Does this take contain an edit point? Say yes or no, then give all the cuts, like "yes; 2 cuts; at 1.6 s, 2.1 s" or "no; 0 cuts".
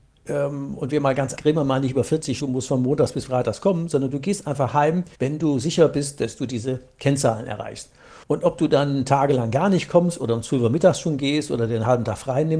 yes; 4 cuts; at 1.4 s, 2.4 s, 5.1 s, 8.2 s